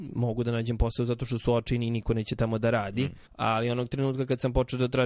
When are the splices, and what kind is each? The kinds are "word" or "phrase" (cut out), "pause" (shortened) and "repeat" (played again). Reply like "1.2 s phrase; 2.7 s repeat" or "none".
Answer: 3.3 s pause